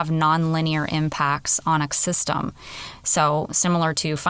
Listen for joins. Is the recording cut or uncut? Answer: cut